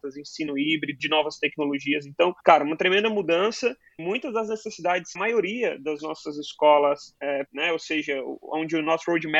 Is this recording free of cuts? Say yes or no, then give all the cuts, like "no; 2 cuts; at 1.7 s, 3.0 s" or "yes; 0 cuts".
no; 6 cuts; at 1.0 s, 2.4 s, 4.0 s, 5.2 s, 7.1 s, 7.5 s